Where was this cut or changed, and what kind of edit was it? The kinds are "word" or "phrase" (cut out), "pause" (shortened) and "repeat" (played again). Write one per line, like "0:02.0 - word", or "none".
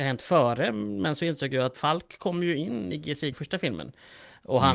0:01.7 - word
0:03.3 - word